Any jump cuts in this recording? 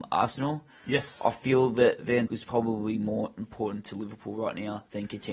yes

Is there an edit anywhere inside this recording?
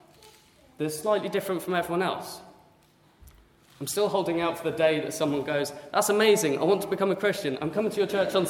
no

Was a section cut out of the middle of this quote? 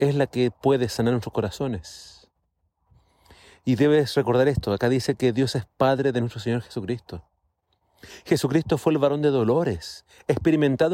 no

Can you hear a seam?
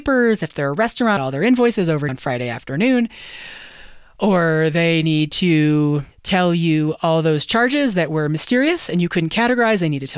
yes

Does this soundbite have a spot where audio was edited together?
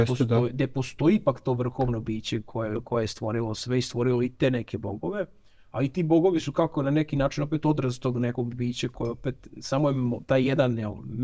no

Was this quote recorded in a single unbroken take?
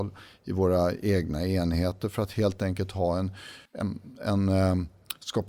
no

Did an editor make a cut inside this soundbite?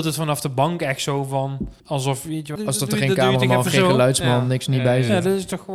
yes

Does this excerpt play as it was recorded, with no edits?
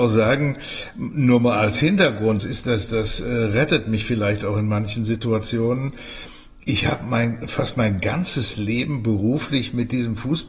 no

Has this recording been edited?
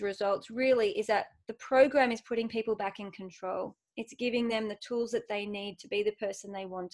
no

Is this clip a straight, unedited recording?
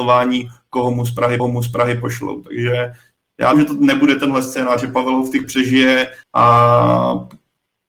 no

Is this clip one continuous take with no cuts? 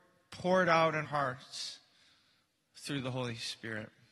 no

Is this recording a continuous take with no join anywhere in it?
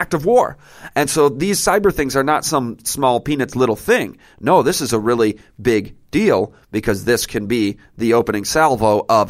yes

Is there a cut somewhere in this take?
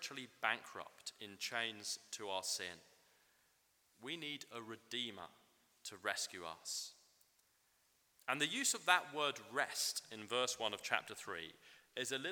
no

